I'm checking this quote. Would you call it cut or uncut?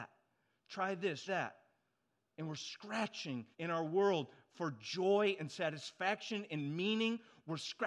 cut